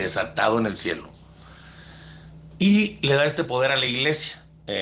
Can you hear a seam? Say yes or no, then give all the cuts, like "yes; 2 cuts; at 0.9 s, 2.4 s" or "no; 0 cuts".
no; 0 cuts